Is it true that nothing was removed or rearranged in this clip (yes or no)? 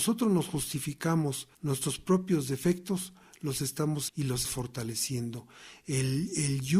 no